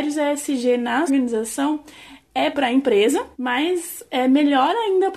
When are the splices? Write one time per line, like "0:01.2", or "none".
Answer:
0:01.1
0:02.5
0:03.3